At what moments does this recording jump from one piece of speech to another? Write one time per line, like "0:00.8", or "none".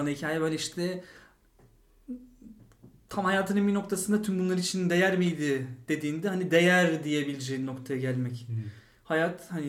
none